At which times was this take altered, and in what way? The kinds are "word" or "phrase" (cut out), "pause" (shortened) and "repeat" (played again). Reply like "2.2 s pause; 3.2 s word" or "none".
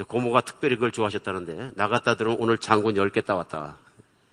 none